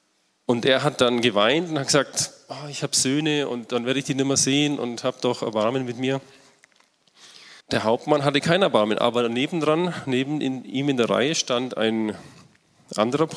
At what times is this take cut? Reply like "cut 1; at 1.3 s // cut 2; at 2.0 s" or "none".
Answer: cut 1; at 7.6 s